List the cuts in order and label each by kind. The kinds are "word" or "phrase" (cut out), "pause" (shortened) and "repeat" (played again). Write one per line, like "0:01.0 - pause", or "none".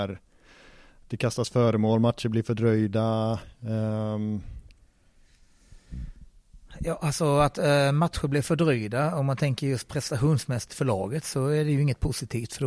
0:03.5 - pause